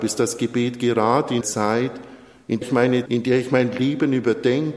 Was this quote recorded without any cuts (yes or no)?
no